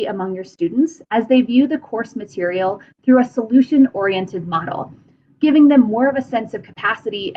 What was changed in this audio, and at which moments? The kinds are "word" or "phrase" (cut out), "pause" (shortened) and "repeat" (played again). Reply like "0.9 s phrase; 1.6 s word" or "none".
none